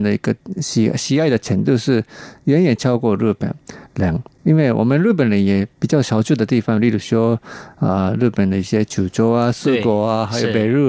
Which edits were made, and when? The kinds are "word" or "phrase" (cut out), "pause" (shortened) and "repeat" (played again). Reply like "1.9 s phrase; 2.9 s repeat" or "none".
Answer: 4.3 s pause